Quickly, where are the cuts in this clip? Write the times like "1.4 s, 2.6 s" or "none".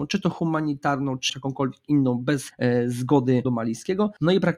1.3 s, 3.4 s